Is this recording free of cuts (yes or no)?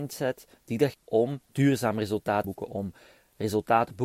no